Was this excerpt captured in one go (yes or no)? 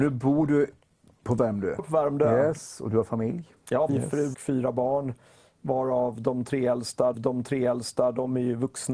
no